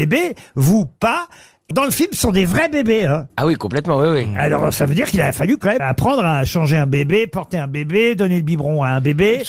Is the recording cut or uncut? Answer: cut